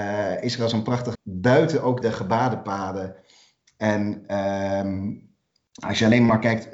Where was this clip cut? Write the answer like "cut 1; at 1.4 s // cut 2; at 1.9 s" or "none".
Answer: cut 1; at 1.1 s // cut 2; at 2.0 s